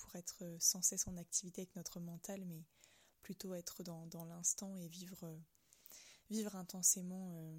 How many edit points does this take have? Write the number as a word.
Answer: zero